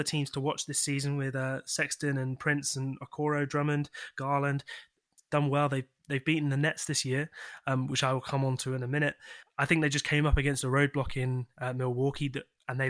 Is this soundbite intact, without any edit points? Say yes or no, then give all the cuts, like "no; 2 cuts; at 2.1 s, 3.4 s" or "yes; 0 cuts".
yes; 0 cuts